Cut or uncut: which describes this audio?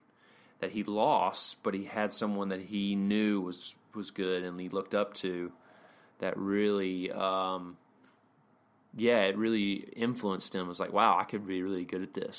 uncut